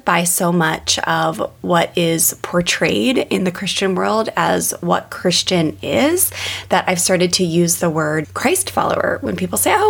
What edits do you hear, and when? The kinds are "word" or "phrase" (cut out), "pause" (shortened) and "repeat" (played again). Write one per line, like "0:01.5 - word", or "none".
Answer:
0:08.2 - word